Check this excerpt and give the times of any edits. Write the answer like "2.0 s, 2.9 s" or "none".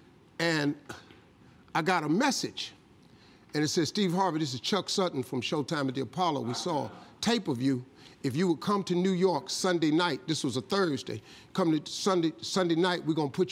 none